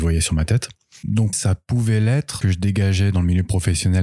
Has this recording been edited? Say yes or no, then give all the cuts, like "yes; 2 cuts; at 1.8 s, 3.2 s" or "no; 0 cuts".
yes; 2 cuts; at 1.3 s, 2.4 s